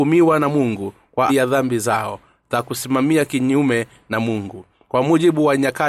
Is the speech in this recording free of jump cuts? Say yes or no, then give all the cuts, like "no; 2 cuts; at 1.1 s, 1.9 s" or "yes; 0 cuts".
no; 1 cut; at 1.3 s